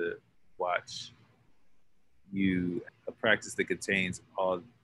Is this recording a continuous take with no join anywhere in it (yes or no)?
no